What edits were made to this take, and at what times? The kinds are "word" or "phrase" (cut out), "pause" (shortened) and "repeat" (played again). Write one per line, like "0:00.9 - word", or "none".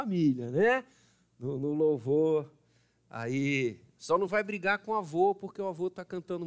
none